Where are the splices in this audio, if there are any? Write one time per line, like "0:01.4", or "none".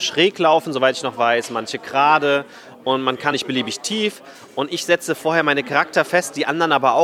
0:03.3